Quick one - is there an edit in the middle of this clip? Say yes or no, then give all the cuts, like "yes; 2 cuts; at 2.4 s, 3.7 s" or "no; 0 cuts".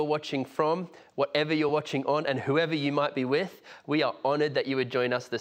no; 0 cuts